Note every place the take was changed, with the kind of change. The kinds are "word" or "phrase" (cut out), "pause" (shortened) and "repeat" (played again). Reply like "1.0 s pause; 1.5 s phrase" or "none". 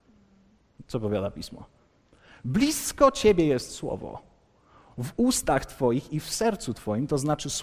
none